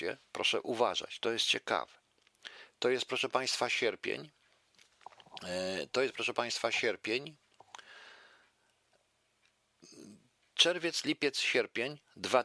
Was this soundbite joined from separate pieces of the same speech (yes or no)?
no